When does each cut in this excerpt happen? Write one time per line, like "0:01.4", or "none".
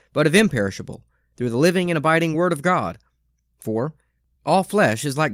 none